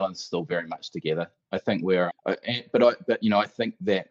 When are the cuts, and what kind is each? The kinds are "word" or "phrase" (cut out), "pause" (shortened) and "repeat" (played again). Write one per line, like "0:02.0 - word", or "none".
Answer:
0:02.1 - word

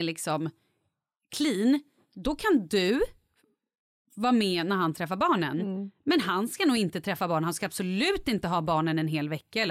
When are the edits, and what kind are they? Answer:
none

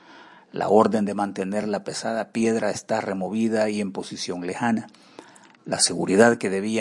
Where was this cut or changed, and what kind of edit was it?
none

